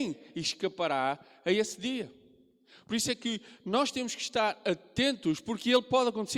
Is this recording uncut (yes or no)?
yes